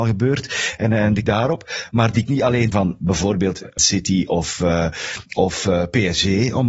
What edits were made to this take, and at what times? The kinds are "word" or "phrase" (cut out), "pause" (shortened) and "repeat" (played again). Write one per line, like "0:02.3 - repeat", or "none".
0:01.2 - word
0:02.3 - phrase
0:02.7 - phrase
0:03.8 - word
0:05.3 - pause

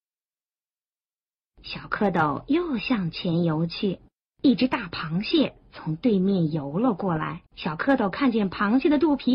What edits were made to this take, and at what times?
0:04.2 - pause
0:07.5 - pause

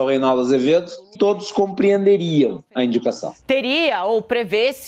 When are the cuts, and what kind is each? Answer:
0:01.2 - word

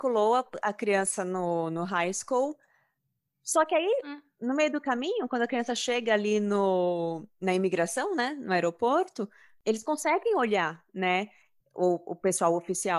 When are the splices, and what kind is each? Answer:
none

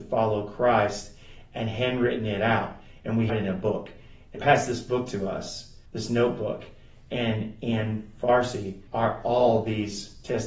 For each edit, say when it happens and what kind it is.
0:03.3 - word
0:04.4 - word
0:05.9 - pause
0:08.9 - pause

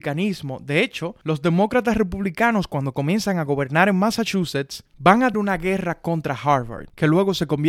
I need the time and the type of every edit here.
0:05.3 - word

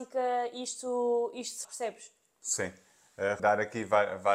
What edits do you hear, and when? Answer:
0:01.6 - word
0:03.4 - word

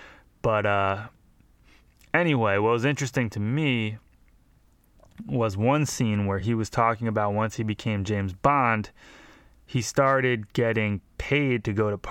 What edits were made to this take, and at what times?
none

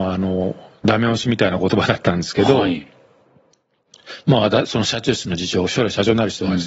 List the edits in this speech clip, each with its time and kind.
none

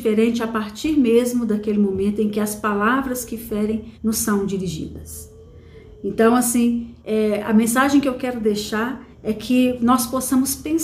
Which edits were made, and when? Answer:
0:03.9 - pause
0:07.0 - pause
0:09.1 - pause

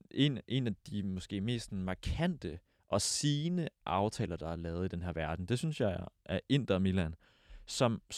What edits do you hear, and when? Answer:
none

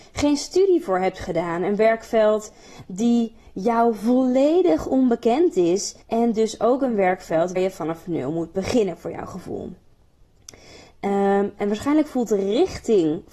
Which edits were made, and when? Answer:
0:06.0 - pause
0:07.6 - word

